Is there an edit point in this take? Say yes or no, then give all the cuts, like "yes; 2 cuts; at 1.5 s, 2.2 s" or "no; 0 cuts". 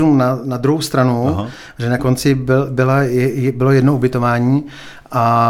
yes; 1 cut; at 2.0 s